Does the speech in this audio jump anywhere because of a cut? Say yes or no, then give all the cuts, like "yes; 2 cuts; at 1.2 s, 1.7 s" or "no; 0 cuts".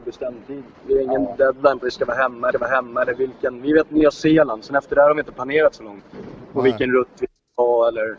yes; 2 cuts; at 1.8 s, 2.5 s